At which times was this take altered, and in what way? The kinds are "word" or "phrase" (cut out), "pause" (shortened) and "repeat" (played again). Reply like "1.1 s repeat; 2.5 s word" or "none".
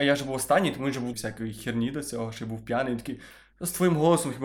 1.1 s phrase